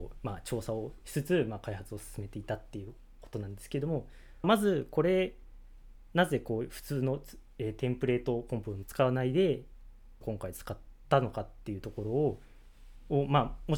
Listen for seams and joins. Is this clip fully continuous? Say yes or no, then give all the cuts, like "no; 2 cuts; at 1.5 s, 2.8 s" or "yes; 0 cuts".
no; 2 cuts; at 4.4 s, 10.2 s